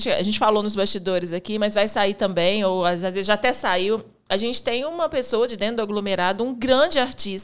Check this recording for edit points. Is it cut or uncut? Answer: uncut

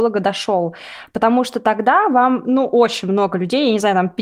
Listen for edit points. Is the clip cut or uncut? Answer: uncut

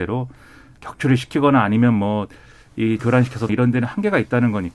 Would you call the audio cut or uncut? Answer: cut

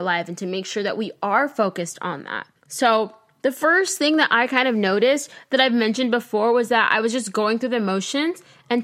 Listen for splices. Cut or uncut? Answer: cut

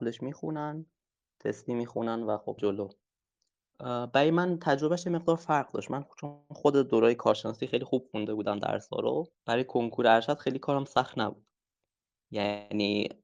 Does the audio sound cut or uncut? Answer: cut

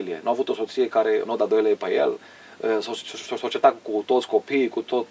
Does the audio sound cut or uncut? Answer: cut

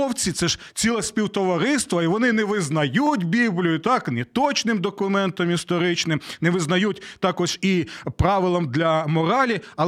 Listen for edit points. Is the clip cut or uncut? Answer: uncut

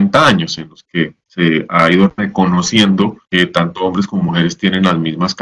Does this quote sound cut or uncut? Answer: cut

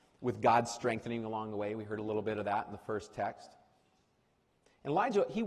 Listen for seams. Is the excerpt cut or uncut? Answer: uncut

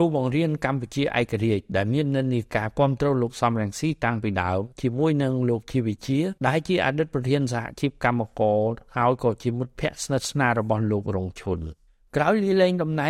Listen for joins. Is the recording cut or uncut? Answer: cut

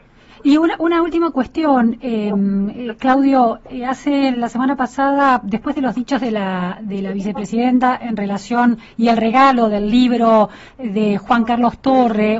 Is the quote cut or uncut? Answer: uncut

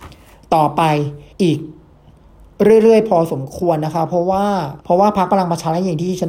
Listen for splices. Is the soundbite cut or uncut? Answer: cut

